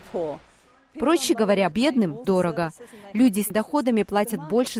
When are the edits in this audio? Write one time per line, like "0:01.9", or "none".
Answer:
0:01.7
0:02.2
0:03.5

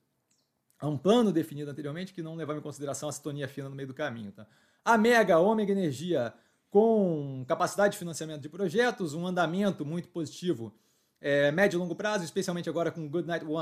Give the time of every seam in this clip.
none

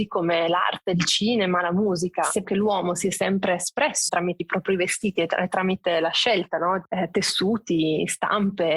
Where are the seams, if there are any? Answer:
0:02.4
0:04.1
0:04.4

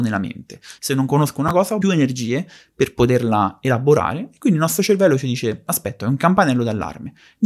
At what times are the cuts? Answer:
0:01.8
0:06.0

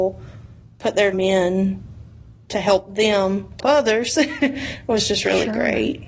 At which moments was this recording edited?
0:01.1
0:03.6

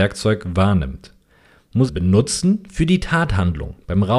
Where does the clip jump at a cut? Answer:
0:01.9

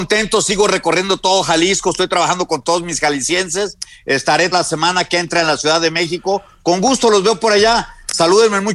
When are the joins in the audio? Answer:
0:04.5

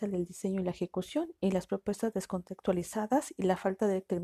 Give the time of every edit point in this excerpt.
none

